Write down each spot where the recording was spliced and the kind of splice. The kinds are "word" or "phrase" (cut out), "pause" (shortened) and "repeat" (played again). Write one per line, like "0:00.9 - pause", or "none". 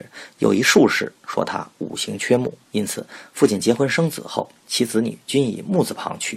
0:02.6 - pause
0:04.6 - pause